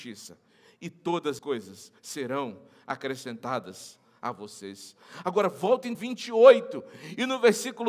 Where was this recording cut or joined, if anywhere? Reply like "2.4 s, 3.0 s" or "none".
1.4 s, 2.0 s, 5.9 s